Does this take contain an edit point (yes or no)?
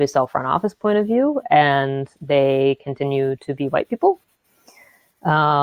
no